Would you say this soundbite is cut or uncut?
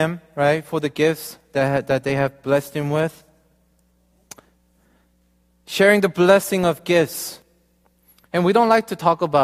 uncut